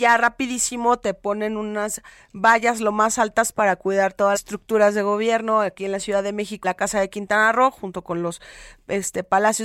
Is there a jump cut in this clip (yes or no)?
yes